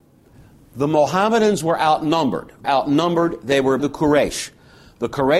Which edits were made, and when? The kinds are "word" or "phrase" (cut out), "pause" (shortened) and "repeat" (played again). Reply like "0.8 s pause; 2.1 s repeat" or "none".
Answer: 2.6 s phrase; 3.8 s phrase